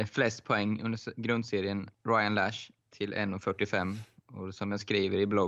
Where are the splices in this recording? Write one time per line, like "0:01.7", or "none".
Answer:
0:01.9
0:02.8